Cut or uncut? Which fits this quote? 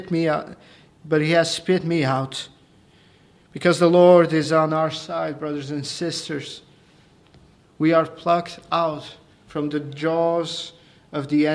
uncut